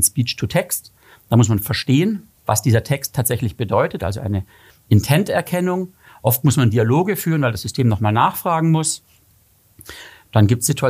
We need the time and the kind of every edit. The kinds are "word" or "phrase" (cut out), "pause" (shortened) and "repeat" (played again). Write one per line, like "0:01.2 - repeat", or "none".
none